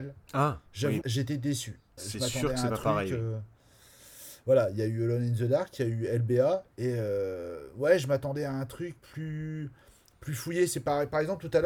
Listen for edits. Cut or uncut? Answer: cut